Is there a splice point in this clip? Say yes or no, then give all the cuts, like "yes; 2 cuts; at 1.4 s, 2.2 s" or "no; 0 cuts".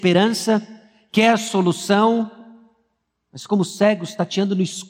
no; 0 cuts